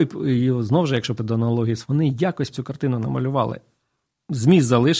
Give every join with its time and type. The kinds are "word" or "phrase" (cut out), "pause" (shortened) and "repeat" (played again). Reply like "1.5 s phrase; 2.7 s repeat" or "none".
1.2 s word; 1.8 s word; 2.5 s word

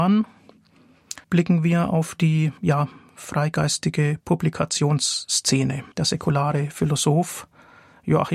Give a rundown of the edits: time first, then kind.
1.2 s pause; 2.6 s pause; 5.9 s pause

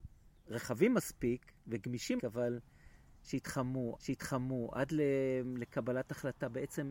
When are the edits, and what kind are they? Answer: 2.2 s word; 4.0 s repeat

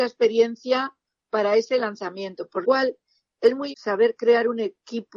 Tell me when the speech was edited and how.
2.6 s word; 3.7 s word

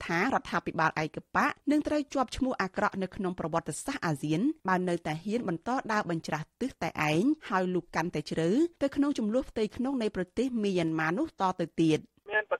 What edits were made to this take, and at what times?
1.6 s pause; 4.6 s pause; 7.4 s pause; 8.8 s pause

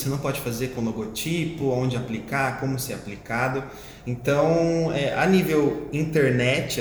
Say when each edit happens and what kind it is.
none

